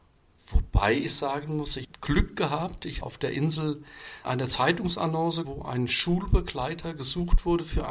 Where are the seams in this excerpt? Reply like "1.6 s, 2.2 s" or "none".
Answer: 1.8 s, 3.0 s, 4.2 s, 5.4 s